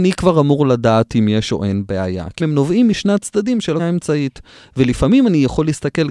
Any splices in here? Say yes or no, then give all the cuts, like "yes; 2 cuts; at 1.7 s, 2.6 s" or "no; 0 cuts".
yes; 2 cuts; at 2.4 s, 3.8 s